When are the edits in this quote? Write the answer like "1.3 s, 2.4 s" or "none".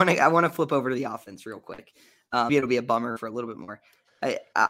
2.5 s